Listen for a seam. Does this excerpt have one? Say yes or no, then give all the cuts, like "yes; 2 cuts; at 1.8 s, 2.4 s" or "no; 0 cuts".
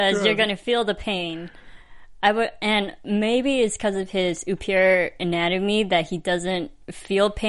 no; 0 cuts